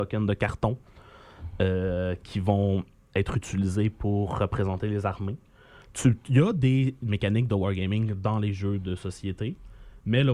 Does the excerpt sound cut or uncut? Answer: uncut